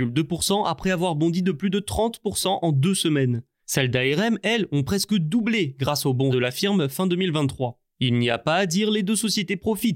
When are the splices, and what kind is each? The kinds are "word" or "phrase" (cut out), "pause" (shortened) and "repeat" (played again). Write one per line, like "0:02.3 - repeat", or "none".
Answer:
0:06.3 - word

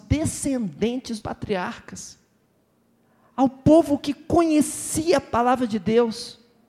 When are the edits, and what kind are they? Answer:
0:01.2 - word

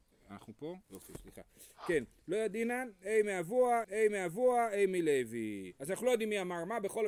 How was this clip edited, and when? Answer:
0:03.8 - repeat

